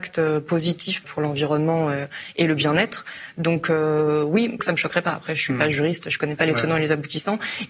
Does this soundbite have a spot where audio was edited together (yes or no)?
yes